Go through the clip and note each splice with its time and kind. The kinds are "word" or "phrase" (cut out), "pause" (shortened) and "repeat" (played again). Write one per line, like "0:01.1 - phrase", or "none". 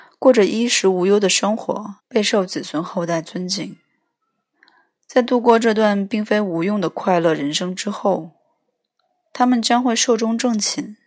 0:02.0 - pause